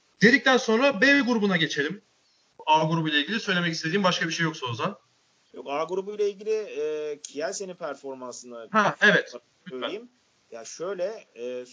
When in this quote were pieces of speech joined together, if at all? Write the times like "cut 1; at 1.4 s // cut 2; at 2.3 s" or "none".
none